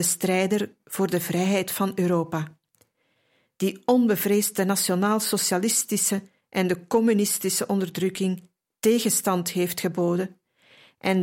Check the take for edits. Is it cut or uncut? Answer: uncut